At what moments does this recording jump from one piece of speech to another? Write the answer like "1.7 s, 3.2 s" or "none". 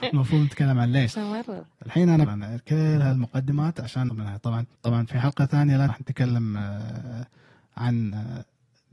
1.1 s, 2.3 s, 4.1 s, 4.8 s, 5.9 s